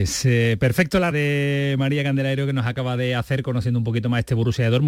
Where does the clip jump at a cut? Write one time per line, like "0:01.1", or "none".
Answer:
0:01.1